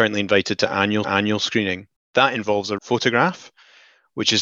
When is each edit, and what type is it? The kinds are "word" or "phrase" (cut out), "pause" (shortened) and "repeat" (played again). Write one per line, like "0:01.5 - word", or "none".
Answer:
0:01.0 - repeat
0:02.8 - word